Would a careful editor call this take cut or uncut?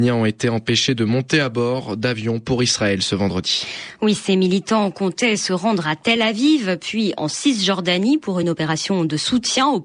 uncut